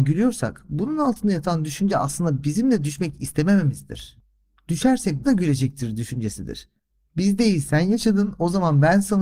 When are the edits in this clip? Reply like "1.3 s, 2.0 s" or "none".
5.2 s